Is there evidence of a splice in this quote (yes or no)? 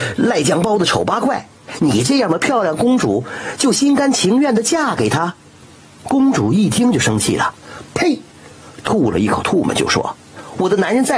no